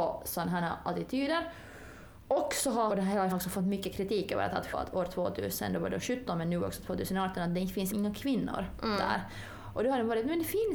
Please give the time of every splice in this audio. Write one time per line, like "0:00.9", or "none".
0:02.9
0:03.3
0:04.7
0:07.9